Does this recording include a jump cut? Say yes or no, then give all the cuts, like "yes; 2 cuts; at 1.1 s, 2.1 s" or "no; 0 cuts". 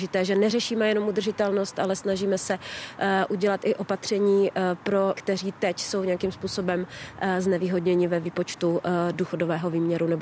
yes; 1 cut; at 5.1 s